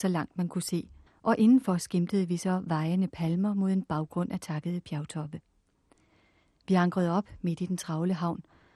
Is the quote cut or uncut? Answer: cut